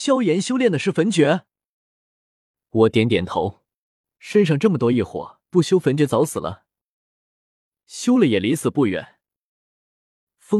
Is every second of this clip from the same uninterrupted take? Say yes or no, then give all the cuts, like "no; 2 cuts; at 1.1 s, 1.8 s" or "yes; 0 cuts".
no; 1 cut; at 5.4 s